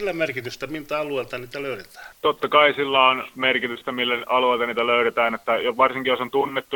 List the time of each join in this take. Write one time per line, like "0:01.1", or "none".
0:02.1